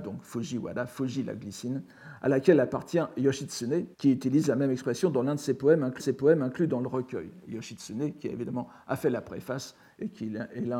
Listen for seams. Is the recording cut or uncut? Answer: cut